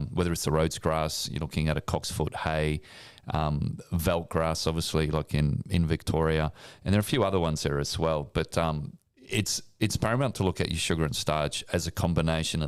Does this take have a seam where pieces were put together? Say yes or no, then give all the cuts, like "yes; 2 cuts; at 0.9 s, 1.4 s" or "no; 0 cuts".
no; 0 cuts